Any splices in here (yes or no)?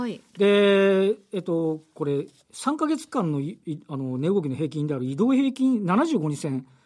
no